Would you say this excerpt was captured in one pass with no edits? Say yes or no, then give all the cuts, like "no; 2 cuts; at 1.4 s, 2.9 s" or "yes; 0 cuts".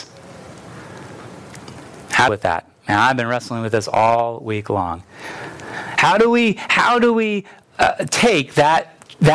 no; 1 cut; at 2.3 s